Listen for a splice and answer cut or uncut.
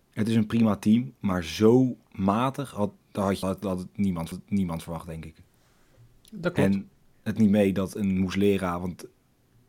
cut